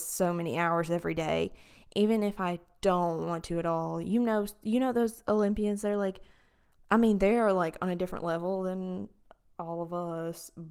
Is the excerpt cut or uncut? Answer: uncut